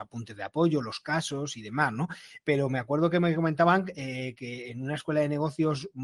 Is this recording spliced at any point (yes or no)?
no